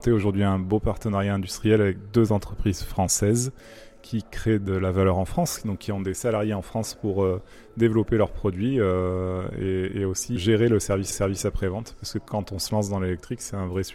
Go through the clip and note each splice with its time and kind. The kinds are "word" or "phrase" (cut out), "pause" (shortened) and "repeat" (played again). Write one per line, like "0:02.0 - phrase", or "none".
0:10.4 - word
0:11.1 - repeat